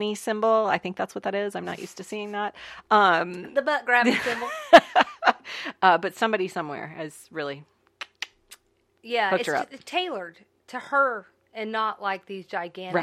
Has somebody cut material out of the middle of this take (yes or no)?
no